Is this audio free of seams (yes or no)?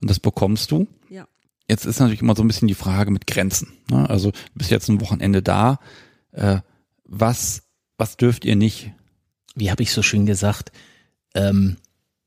yes